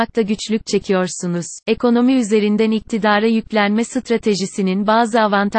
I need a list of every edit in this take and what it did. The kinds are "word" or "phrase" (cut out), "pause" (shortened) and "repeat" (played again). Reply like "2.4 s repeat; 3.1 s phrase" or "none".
1.6 s pause